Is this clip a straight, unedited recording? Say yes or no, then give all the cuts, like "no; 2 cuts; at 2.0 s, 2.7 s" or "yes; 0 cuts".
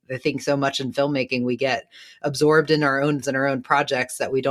no; 1 cut; at 3.2 s